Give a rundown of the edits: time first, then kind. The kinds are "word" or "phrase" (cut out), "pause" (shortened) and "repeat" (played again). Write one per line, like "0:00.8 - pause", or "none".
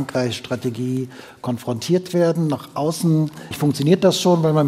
0:03.5 - word